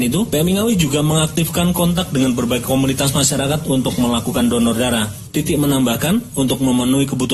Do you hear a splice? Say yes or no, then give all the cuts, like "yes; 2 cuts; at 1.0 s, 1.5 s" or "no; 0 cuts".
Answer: no; 0 cuts